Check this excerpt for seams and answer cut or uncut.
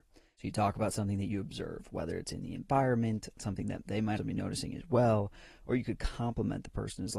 cut